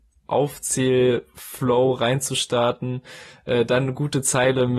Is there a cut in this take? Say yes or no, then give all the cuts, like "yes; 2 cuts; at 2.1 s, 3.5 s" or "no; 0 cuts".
no; 0 cuts